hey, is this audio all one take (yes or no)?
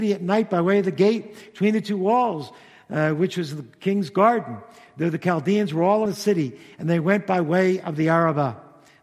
no